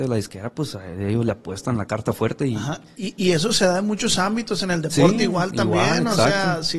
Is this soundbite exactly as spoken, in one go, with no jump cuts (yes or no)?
yes